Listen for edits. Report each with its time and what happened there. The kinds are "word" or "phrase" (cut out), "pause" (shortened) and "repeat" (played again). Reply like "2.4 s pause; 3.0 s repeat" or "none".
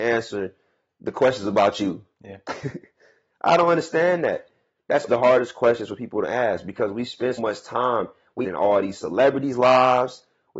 5.1 s word; 7.4 s word; 8.4 s word